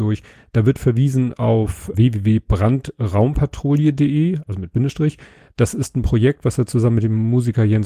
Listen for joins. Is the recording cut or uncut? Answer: cut